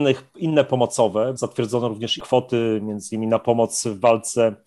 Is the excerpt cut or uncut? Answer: cut